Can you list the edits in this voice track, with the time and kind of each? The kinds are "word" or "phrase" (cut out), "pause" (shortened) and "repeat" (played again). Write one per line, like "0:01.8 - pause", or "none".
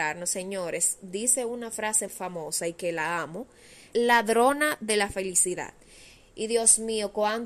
0:02.1 - word
0:03.9 - phrase